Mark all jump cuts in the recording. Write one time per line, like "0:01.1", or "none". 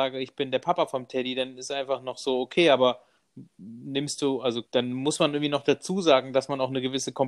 0:04.7